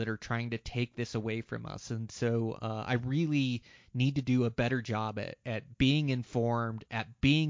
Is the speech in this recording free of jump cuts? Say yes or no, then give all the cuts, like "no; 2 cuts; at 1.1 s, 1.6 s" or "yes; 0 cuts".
yes; 0 cuts